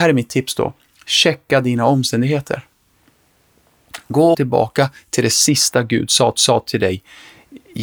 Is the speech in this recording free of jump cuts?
no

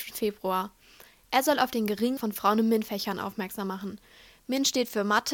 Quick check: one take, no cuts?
no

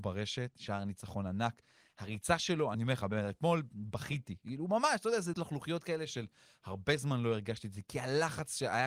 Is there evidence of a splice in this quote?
yes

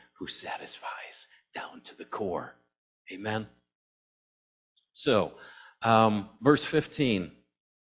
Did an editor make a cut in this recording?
no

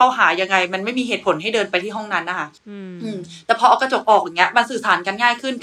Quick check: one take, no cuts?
no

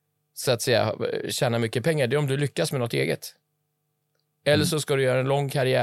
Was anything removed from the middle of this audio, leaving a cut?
no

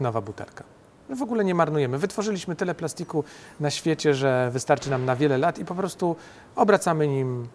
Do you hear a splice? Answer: no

